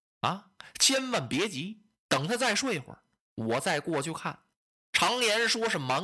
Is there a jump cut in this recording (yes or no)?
no